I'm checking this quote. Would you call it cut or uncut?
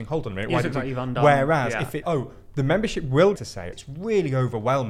cut